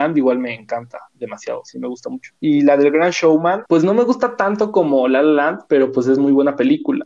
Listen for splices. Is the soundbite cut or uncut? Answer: cut